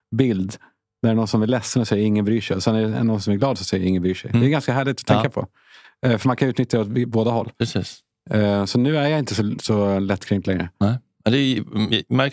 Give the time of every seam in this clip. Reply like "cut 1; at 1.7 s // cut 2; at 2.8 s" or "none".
none